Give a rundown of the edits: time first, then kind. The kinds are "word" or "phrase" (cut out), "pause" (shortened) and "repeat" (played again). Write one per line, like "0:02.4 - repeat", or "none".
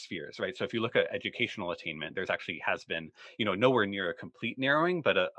none

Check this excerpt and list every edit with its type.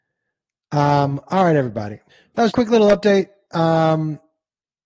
0:02.1 - pause
0:02.5 - word

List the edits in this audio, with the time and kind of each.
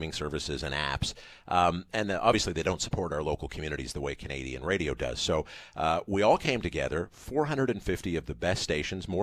none

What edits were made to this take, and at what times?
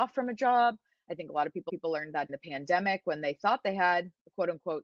0:01.7 - repeat
0:02.3 - word

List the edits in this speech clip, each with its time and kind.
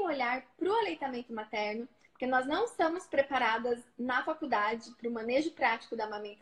none

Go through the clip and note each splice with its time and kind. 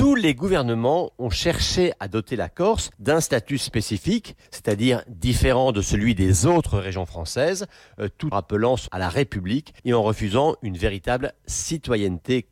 0:02.9 - pause
0:04.4 - pause
0:08.3 - word
0:08.9 - word
0:09.8 - pause

